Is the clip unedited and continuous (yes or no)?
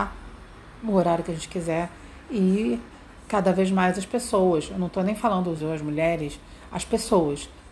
no